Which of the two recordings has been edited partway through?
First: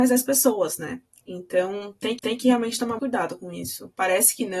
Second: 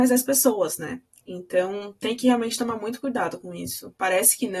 first; 2 cuts; at 2.2 s, 3.0 s

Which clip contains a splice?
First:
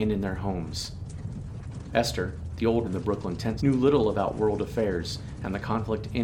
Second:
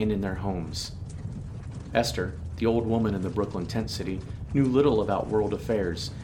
first; 2 cuts; at 2.8 s, 3.6 s

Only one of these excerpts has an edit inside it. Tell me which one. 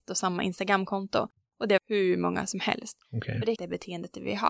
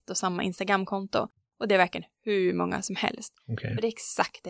first; 2 cuts; at 1.8 s, 3.6 s

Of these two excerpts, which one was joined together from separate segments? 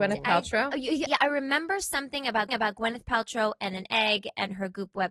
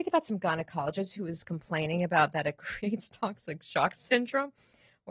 first; 2 cuts; at 1.1 s, 2.5 s

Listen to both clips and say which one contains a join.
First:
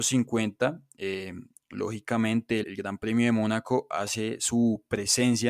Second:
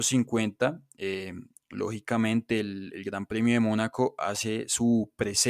first; 1 cut; at 2.6 s

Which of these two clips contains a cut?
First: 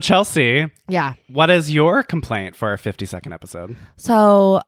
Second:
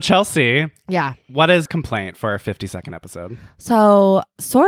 second; 1 cut; at 1.7 s

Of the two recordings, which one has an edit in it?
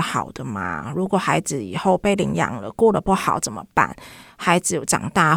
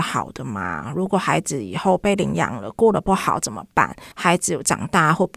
second; 1 cut; at 4.1 s

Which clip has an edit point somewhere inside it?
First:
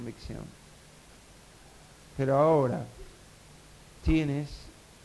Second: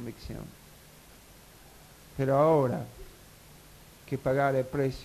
second; 1 cut; at 3.9 s

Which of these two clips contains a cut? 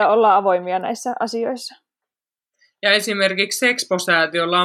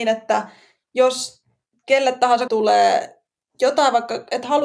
second; 1 cut; at 2.5 s

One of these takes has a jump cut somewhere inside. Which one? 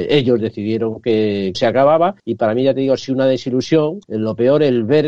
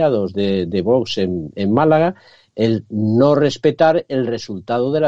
first; 3 cuts; at 1.5 s, 2.2 s, 4.0 s

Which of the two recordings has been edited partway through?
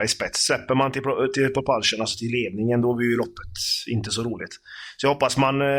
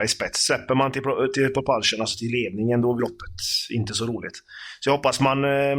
second; 1 cut; at 3.0 s

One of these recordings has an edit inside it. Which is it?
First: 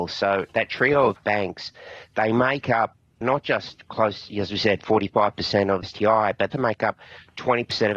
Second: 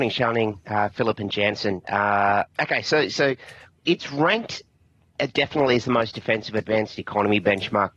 first; 3 cuts; at 3.2 s, 5.8 s, 6.5 s

